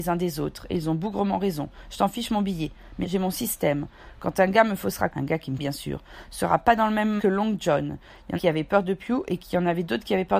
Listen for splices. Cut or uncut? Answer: cut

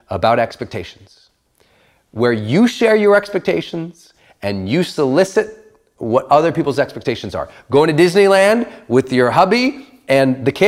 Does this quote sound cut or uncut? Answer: uncut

